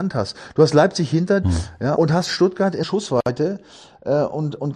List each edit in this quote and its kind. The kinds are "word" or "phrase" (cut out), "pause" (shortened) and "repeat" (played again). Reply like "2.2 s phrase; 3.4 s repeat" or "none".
1.4 s word; 2.0 s word; 2.8 s word